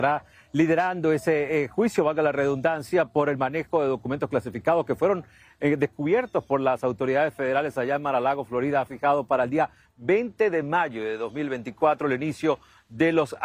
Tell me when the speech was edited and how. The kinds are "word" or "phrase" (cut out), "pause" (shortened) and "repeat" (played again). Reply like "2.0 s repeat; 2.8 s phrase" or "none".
none